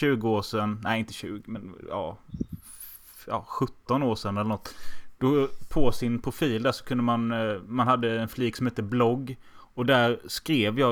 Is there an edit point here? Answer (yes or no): no